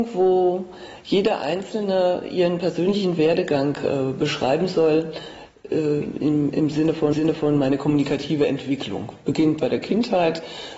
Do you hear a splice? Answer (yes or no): yes